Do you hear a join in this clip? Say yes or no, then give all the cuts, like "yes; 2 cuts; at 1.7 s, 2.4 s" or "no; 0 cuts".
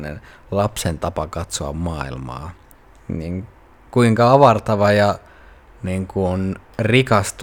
no; 0 cuts